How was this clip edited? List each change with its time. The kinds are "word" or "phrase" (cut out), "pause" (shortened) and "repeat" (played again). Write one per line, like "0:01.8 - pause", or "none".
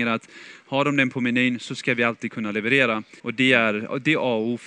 0:03.2 - pause